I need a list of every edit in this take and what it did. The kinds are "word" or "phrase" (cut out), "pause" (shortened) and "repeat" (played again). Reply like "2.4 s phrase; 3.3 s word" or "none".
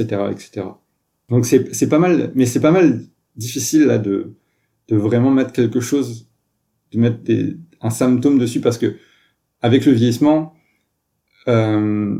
none